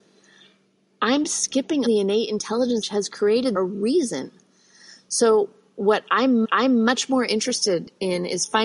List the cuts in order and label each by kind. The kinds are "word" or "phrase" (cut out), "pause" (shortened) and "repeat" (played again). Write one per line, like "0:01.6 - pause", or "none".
0:01.9 - word
0:02.8 - phrase
0:03.6 - phrase
0:06.4 - repeat